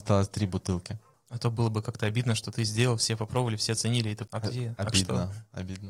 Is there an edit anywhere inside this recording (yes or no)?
yes